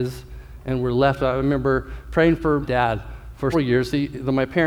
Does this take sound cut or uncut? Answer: cut